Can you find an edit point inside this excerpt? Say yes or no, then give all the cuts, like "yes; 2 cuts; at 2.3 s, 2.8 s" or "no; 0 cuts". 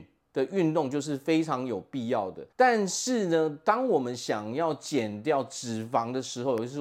yes; 1 cut; at 2.5 s